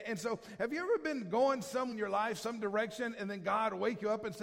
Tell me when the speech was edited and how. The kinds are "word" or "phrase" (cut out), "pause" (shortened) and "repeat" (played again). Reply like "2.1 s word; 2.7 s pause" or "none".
1.9 s word